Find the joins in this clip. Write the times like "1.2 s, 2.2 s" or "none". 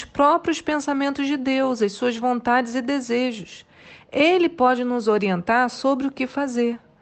none